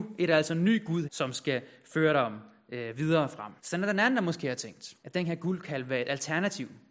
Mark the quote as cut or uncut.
cut